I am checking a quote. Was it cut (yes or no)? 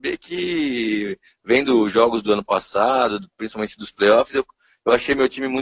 no